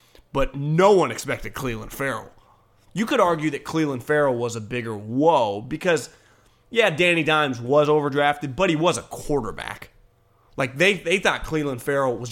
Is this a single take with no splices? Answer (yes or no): yes